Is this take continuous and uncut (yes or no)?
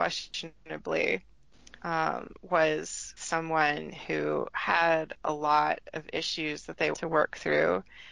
no